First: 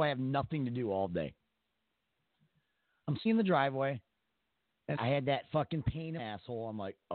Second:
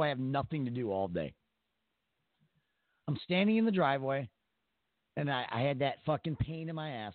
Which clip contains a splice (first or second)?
first